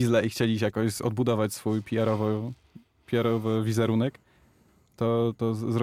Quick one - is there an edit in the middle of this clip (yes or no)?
no